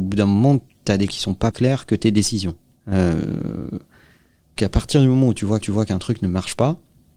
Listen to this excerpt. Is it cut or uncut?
cut